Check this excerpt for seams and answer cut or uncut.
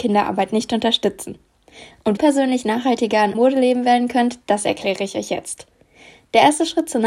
cut